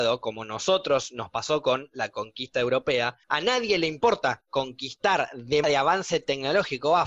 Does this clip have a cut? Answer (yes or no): yes